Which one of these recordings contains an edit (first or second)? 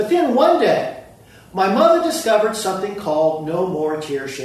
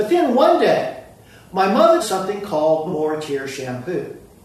second